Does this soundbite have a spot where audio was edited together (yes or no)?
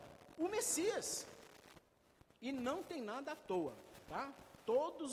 no